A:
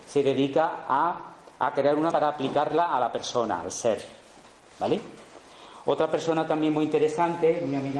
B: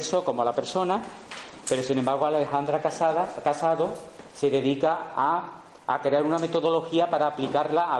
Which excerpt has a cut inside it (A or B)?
A